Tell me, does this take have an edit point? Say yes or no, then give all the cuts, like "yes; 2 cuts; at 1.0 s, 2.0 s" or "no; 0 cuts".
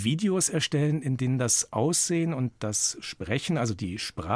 no; 0 cuts